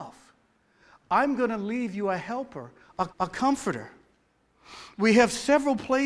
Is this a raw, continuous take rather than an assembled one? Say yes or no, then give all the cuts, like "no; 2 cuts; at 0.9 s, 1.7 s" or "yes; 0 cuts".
no; 1 cut; at 3.1 s